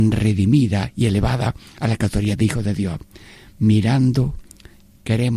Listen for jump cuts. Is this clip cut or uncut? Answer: uncut